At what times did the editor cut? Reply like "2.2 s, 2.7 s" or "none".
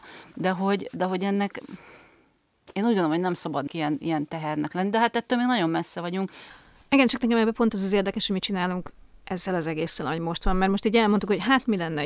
3.7 s